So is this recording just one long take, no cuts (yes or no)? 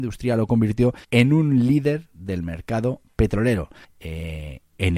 no